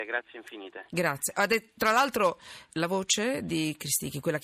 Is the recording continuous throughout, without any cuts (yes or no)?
no